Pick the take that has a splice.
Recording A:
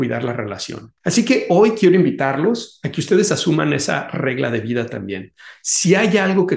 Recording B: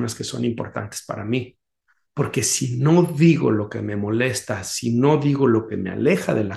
A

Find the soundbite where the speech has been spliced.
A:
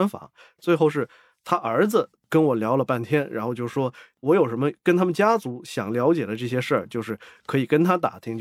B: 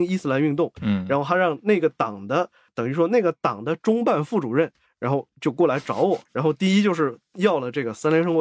B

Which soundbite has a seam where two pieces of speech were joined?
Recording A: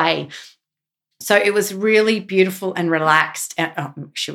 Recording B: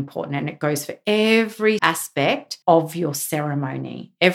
B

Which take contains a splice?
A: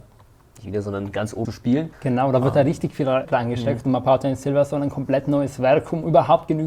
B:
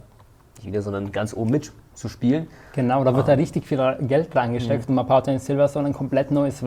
A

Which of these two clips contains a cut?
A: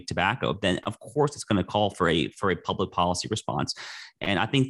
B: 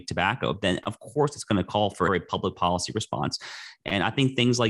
B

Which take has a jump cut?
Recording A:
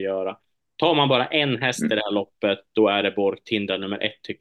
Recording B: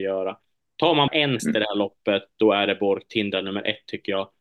B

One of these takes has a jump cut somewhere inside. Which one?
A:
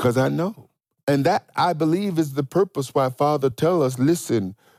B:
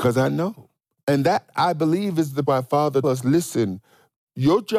B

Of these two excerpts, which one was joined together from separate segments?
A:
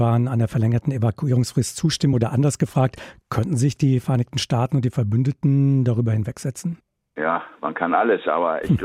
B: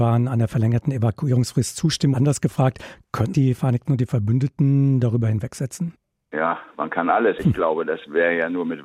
B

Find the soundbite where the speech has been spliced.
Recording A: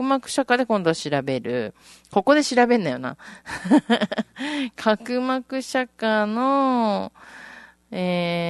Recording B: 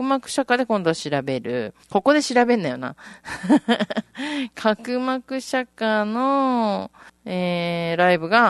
B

